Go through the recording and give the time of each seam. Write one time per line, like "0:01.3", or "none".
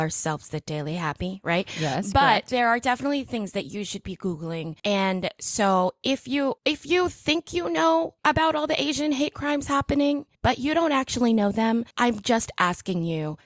0:04.8
0:06.6
0:08.2
0:10.3
0:11.9